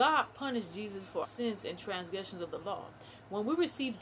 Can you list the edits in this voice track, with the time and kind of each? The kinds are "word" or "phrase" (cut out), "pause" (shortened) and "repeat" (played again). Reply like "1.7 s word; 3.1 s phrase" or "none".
1.2 s word